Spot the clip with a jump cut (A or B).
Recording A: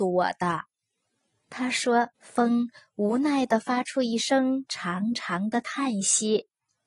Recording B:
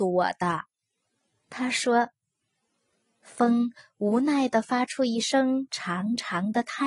A